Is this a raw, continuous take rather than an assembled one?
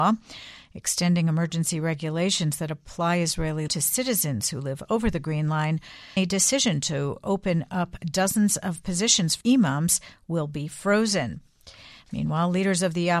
no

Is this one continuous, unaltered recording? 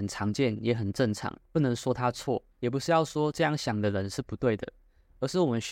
no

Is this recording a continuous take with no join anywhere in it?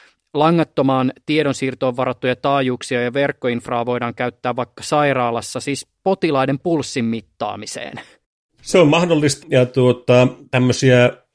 no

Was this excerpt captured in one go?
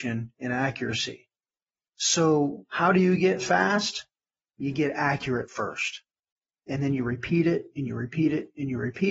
yes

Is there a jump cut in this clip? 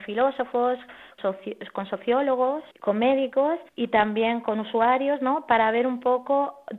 yes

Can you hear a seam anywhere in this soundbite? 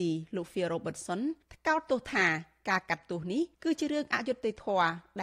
yes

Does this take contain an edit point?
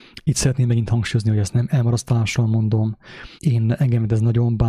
yes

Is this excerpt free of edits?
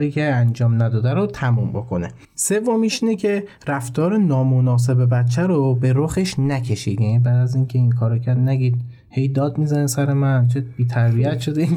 no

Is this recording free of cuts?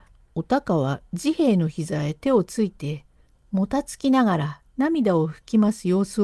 yes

